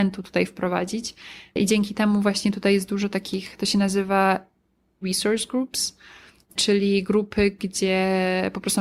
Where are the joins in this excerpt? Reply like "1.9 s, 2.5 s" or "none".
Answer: 5.0 s